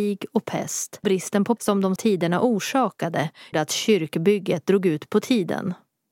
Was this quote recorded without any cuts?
no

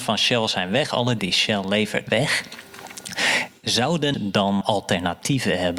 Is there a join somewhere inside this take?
yes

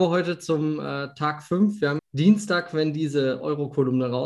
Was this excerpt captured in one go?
no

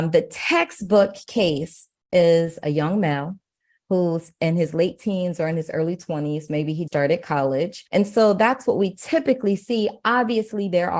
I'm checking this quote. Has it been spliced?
yes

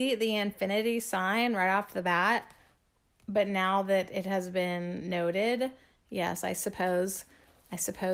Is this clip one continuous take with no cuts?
yes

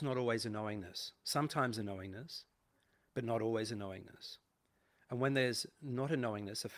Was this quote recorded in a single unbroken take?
yes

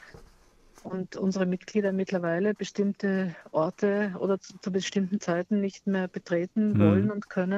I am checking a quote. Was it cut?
no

